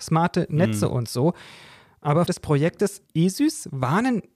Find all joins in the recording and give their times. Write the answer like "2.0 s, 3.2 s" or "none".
2.3 s, 3.1 s